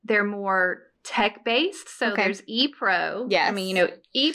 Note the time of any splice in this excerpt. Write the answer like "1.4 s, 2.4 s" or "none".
0.9 s